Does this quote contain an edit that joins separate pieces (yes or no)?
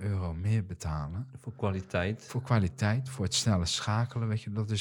no